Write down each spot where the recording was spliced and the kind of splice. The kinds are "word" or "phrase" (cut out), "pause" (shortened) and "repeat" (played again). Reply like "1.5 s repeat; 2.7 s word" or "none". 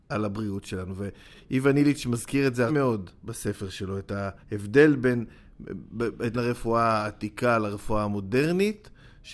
2.7 s word; 3.2 s pause; 4.4 s pause; 6.3 s phrase